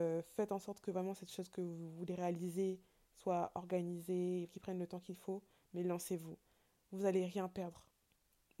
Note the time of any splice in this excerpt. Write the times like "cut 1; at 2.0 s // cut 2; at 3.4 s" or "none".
cut 1; at 4.5 s